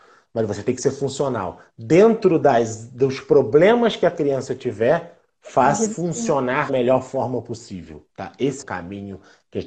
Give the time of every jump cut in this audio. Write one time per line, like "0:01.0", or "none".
0:05.9
0:06.7
0:08.1
0:08.6